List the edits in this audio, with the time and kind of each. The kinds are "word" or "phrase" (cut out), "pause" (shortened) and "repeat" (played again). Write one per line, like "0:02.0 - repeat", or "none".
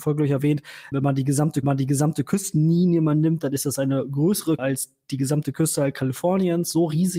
0:00.9 - word
0:01.6 - repeat
0:04.6 - word